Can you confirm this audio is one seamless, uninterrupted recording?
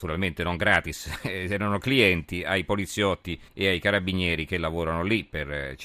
no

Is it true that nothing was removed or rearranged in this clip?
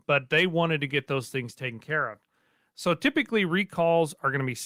yes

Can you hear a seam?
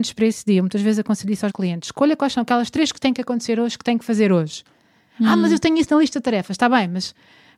yes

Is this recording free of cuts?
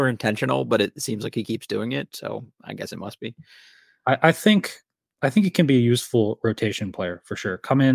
yes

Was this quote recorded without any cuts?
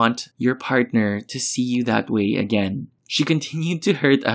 no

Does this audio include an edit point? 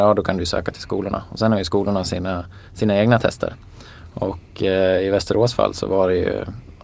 no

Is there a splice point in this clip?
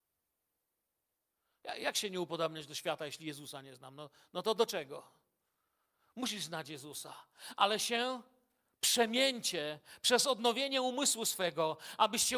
no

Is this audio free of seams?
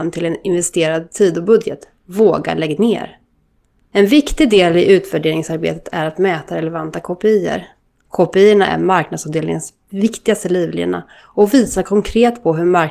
yes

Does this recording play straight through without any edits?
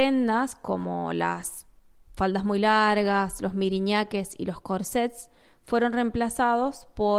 yes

